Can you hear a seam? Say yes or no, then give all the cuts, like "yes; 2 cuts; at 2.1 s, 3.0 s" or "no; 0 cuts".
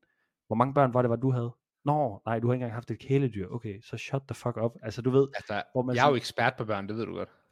no; 0 cuts